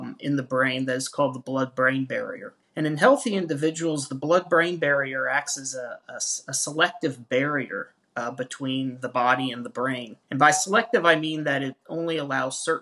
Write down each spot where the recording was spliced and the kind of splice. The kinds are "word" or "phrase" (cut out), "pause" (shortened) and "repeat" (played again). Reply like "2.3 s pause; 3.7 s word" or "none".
2.6 s pause; 10.2 s pause